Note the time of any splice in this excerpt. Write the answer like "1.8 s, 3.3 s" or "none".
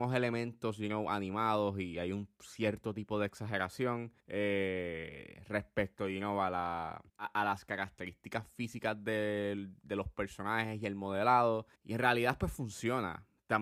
4.2 s, 7.1 s, 11.8 s